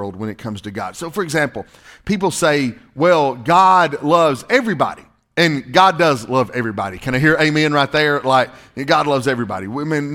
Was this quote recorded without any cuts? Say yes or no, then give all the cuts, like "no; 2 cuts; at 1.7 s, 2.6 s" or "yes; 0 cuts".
yes; 0 cuts